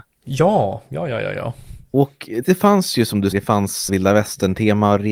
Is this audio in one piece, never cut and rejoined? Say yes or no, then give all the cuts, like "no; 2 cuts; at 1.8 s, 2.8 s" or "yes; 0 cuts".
no; 3 cuts; at 2.4 s, 3.3 s, 3.9 s